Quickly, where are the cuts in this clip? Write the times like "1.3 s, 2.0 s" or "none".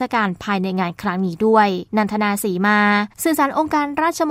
1.9 s, 3.1 s